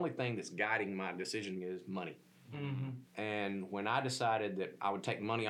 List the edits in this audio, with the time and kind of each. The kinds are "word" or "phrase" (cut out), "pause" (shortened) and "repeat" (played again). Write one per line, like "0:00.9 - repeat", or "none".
0:01.6 - word
0:02.3 - pause

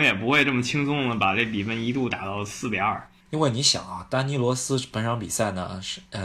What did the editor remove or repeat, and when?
none

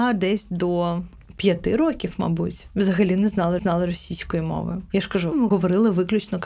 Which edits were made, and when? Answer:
0:03.6 - repeat
0:05.3 - word

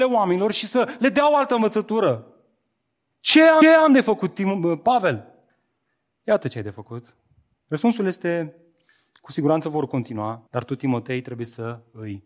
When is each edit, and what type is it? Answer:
0:03.6 - repeat
0:10.5 - pause

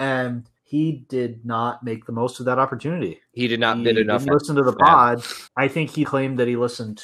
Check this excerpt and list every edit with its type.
0:04.3 - word
0:05.5 - pause
0:06.0 - word

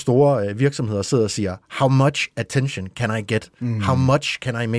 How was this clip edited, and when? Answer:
none

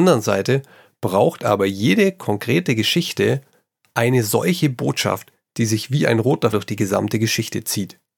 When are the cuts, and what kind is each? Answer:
0:06.5 - word

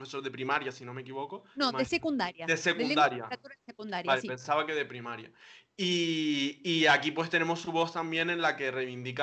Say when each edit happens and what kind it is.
none

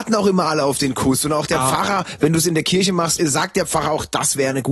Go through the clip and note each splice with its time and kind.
0:03.2 - word

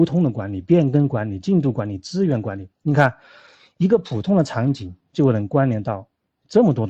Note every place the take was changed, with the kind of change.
0:02.7 - pause

